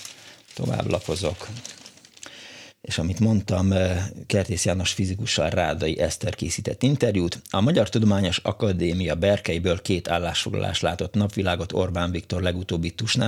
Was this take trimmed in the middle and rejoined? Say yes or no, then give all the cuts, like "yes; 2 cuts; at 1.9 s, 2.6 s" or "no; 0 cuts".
no; 0 cuts